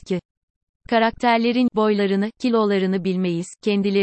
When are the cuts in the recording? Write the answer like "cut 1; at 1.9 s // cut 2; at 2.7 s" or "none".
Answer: cut 1; at 1.7 s